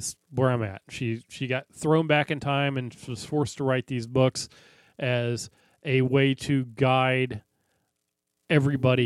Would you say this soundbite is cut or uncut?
uncut